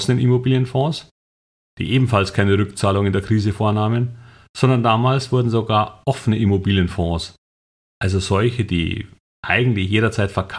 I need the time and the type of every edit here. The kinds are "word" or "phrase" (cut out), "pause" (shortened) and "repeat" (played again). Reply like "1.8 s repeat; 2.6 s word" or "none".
none